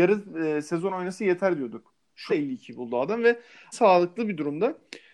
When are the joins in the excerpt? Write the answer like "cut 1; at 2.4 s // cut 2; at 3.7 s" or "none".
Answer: cut 1; at 2.3 s // cut 2; at 3.7 s